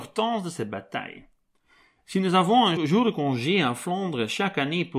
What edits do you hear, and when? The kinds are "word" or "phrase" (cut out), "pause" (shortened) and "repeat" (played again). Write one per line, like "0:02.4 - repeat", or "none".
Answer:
0:02.8 - word